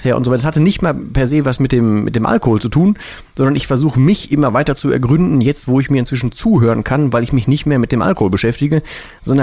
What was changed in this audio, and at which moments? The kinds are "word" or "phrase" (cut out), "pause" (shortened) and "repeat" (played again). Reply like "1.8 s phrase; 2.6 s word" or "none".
1.0 s word

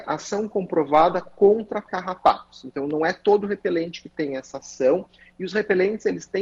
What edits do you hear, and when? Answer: none

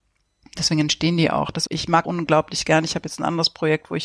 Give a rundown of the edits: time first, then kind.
1.7 s word; 2.0 s word

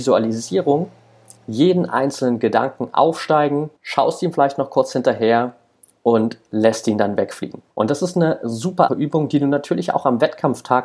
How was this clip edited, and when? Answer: 3.8 s pause; 7.7 s pause; 8.9 s word

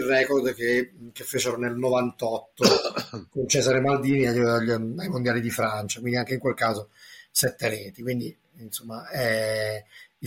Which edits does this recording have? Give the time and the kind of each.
none

